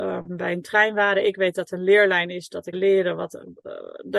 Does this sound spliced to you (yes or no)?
yes